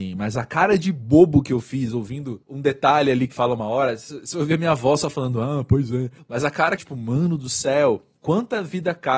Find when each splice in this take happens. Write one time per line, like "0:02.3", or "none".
0:02.4
0:03.3
0:06.2
0:06.8
0:08.1